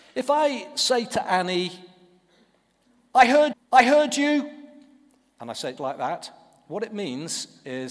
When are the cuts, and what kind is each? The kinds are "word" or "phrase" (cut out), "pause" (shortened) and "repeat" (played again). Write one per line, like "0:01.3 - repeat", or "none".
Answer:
0:03.5 - repeat
0:05.8 - word